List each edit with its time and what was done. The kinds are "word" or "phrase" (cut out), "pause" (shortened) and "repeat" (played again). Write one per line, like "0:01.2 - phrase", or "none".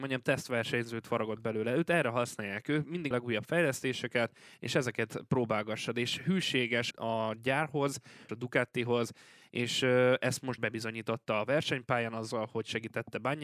0:03.1 - phrase
0:06.9 - word
0:08.3 - word
0:10.6 - word